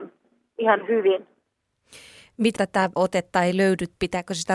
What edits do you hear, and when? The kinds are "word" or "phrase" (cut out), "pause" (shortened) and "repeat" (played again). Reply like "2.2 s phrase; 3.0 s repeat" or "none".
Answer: 2.6 s word; 3.0 s word